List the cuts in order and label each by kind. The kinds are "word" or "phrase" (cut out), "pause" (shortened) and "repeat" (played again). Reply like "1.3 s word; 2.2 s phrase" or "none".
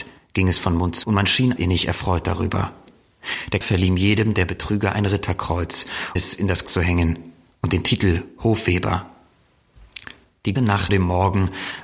1.0 s word; 1.6 s word; 3.6 s word; 6.2 s word; 6.7 s word; 10.6 s word; 10.9 s word